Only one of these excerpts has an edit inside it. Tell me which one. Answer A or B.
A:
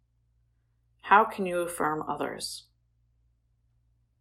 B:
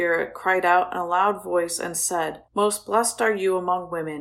B